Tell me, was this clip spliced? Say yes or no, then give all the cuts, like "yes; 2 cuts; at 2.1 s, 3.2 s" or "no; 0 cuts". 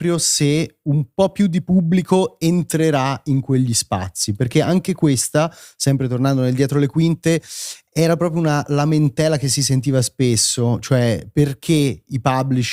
no; 0 cuts